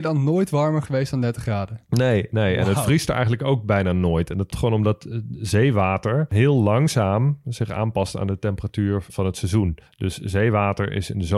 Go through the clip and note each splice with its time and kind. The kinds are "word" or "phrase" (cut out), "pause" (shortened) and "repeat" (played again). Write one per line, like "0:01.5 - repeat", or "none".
0:04.5 - word
0:09.1 - word